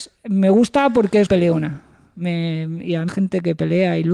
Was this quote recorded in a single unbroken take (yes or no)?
no